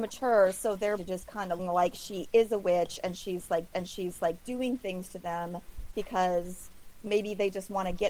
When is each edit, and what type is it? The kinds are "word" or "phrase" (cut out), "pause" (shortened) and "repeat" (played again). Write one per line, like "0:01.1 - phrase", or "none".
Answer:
0:01.0 - phrase
0:01.6 - phrase
0:03.7 - repeat
0:07.1 - word